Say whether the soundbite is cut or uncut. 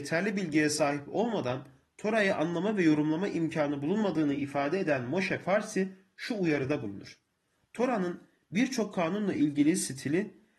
uncut